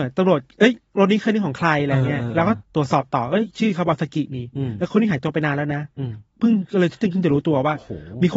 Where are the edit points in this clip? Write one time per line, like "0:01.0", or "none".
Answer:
0:02.6